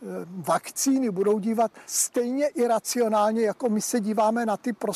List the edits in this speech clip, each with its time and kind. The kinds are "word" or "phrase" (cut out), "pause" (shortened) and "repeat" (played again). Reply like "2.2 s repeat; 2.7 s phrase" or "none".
1.8 s pause